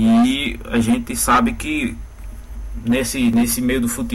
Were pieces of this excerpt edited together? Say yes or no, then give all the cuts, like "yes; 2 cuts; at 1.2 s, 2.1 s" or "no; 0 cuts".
no; 0 cuts